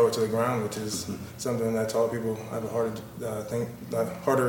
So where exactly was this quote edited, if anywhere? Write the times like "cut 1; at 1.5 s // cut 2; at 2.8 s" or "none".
none